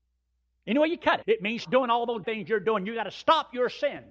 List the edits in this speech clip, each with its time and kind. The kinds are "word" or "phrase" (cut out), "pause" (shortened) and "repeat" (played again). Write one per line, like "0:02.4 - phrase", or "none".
0:01.2 - word
0:01.6 - word
0:02.2 - word